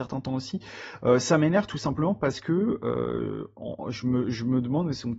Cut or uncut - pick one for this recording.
uncut